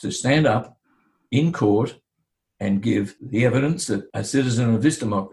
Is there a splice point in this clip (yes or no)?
no